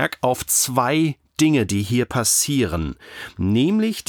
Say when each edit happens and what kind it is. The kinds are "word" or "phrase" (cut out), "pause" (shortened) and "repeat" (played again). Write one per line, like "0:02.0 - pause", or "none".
none